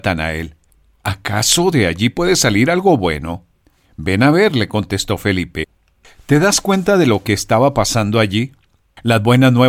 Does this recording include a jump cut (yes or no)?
no